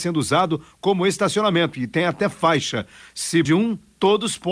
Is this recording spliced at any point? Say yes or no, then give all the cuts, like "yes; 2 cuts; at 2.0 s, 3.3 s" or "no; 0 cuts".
yes; 1 cut; at 3.5 s